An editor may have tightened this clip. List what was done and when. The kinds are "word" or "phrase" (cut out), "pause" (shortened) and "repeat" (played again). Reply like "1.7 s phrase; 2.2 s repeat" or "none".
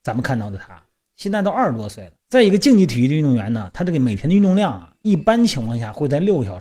2.2 s pause